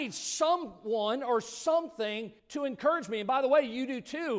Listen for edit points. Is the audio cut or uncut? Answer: cut